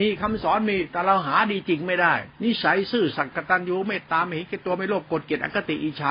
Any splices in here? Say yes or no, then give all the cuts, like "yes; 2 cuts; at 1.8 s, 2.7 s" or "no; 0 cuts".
yes; 1 cut; at 2.3 s